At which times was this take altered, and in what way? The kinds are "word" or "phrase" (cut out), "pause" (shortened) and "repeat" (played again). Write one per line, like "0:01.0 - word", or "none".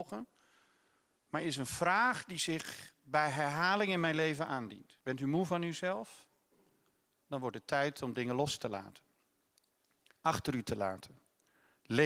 0:05.0 - pause